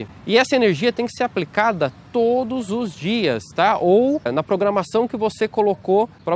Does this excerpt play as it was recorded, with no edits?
yes; 0 cuts

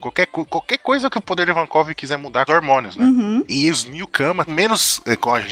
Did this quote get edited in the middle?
yes; 2 cuts; at 2.5 s, 4.5 s

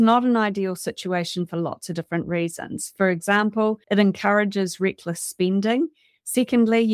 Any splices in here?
yes; 1 cut; at 3.8 s

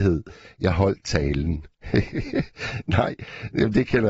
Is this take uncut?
no; 1 cut; at 1.8 s

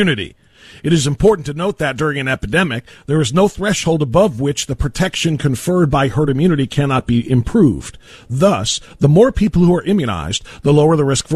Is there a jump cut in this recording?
no; 0 cuts

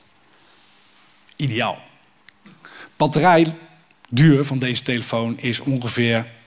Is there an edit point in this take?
no; 0 cuts

